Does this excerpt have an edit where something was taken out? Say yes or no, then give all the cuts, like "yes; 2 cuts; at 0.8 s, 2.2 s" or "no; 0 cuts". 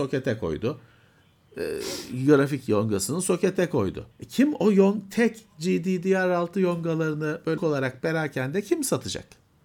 yes; 2 cuts; at 4.1 s, 7.6 s